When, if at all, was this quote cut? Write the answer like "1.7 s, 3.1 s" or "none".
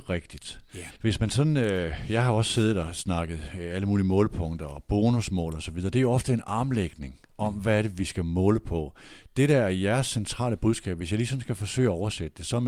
1.0 s